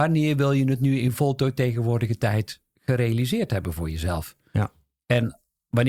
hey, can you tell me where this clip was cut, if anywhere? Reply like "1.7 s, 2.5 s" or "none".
none